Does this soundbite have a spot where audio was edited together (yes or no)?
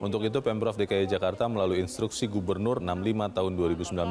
yes